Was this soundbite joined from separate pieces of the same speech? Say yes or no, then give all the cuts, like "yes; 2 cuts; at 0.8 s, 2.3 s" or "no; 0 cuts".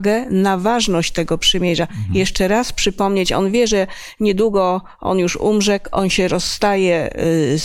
no; 0 cuts